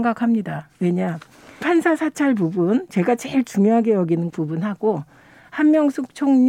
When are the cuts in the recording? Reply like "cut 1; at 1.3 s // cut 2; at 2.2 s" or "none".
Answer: cut 1; at 1.6 s // cut 2; at 4.3 s